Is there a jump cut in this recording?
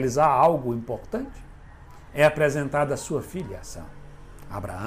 no; 0 cuts

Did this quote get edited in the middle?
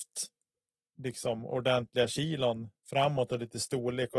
yes; 1 cut; at 2.8 s

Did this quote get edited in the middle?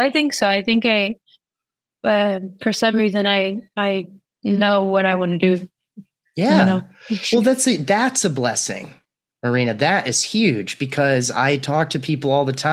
no; 0 cuts

